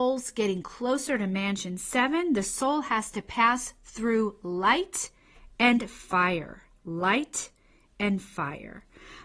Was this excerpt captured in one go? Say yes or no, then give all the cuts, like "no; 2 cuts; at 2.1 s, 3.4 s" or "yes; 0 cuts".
yes; 0 cuts